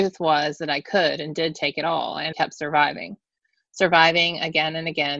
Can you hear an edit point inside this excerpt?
yes; 1 cut; at 2.3 s

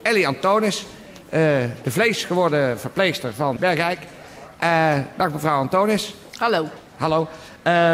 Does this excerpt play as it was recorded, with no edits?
no; 1 cut; at 3.6 s

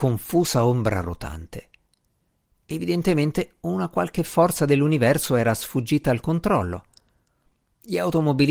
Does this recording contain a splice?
no; 0 cuts

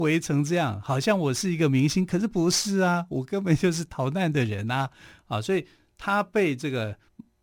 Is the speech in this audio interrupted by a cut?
no; 0 cuts

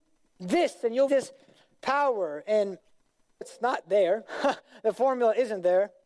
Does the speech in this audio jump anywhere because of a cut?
yes; 2 cuts; at 1.1 s, 3.4 s

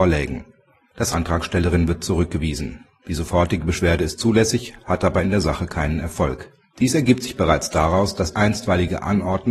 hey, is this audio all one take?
no; 3 cuts; at 1.1 s, 6.6 s, 8.3 s

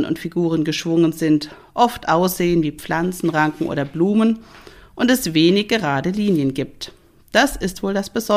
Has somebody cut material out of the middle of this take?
no; 0 cuts

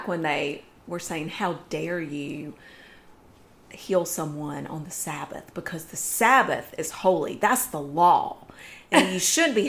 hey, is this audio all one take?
yes; 0 cuts

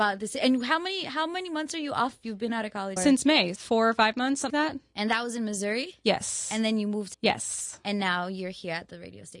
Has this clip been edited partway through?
yes; 4 cuts; at 3.0 s, 3.6 s, 4.5 s, 7.1 s

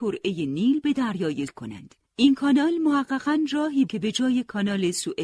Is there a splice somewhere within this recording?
yes; 3 cuts; at 1.5 s, 2.1 s, 3.9 s

